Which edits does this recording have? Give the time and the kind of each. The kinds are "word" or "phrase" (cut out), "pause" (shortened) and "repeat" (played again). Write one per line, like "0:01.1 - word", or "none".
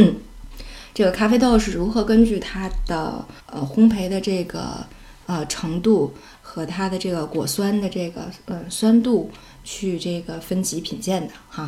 0:03.4 - pause